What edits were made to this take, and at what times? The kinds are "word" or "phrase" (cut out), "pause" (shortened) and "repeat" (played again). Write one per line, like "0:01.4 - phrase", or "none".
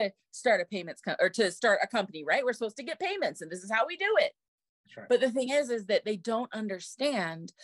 none